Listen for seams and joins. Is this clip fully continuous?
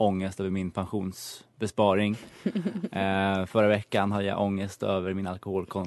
yes; 0 cuts

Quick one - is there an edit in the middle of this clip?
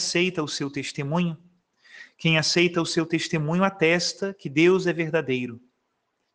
no; 0 cuts

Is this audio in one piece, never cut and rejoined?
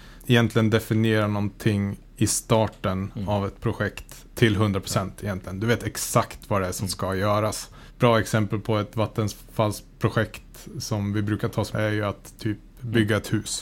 no; 2 cuts; at 4.3 s, 11.7 s

